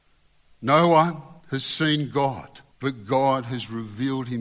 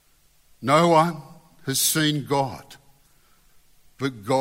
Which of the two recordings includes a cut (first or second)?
first